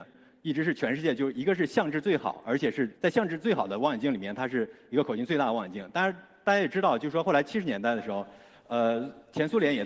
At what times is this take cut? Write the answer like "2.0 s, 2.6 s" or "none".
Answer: 2.9 s